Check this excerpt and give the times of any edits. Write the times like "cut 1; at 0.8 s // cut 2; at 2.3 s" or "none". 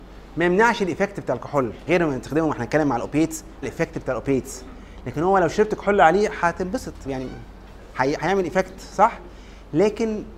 cut 1; at 1.9 s // cut 2; at 3.6 s // cut 3; at 7.1 s

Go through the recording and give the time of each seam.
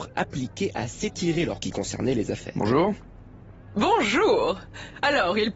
cut 1; at 1.6 s

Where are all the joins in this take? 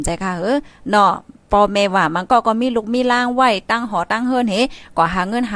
none

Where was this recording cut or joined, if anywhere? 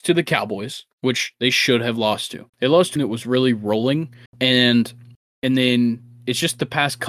cut 1; at 2.5 s // cut 2; at 3.0 s // cut 3; at 4.3 s

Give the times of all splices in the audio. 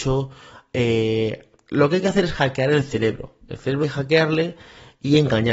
cut 1; at 3.8 s

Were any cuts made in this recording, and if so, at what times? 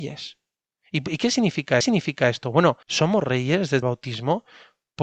cut 1; at 1.8 s // cut 2; at 2.8 s // cut 3; at 3.8 s

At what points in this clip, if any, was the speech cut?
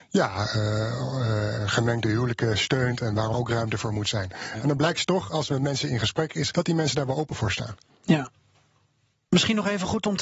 cut 1; at 1.6 s // cut 2; at 3.3 s // cut 3; at 6.5 s // cut 4; at 7.9 s

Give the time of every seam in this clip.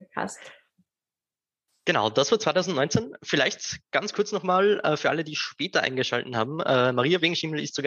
none

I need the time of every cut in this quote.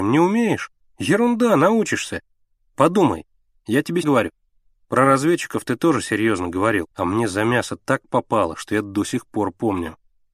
cut 1; at 4.0 s // cut 2; at 6.9 s

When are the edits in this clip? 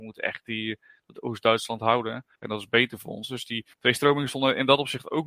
cut 1; at 2.3 s // cut 2; at 3.7 s

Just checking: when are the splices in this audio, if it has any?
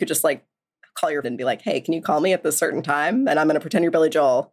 cut 1; at 1.2 s

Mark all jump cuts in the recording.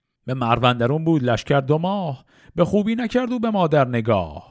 none

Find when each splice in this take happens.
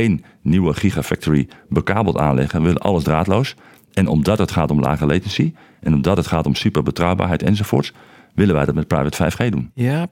none

